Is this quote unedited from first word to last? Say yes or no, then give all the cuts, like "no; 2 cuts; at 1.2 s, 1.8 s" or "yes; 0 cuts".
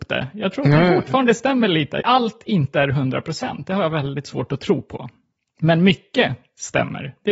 no; 1 cut; at 2.0 s